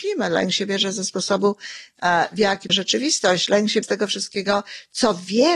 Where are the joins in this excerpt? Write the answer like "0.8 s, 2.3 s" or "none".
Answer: 2.7 s, 3.8 s